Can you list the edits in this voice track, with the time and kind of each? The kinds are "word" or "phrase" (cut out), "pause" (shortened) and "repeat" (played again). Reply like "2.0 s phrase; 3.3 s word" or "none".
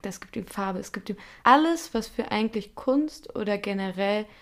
1.4 s pause